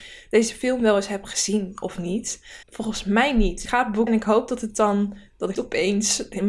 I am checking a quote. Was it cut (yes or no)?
yes